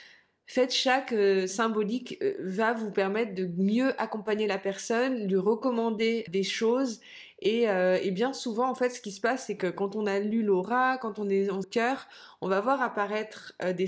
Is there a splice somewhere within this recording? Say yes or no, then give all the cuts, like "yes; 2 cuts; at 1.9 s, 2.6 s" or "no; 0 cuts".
yes; 2 cuts; at 6.3 s, 11.6 s